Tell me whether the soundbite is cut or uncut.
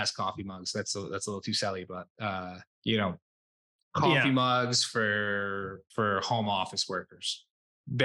cut